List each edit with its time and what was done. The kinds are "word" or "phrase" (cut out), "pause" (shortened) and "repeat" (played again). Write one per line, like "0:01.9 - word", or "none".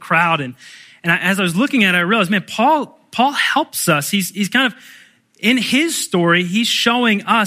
none